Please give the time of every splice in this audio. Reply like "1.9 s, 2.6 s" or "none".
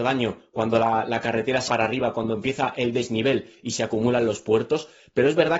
1.7 s